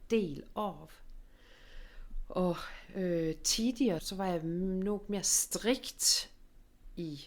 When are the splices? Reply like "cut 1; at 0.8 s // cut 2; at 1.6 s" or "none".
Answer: cut 1; at 4.0 s